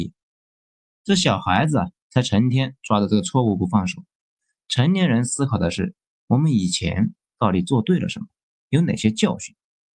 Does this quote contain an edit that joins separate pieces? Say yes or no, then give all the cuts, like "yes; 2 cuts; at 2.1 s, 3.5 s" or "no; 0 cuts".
no; 0 cuts